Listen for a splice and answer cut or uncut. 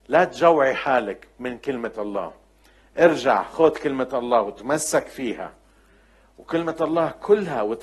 uncut